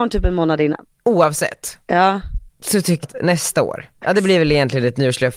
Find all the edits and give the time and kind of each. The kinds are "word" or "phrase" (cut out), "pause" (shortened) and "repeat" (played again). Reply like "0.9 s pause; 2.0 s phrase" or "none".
2.5 s pause; 3.0 s word; 4.0 s word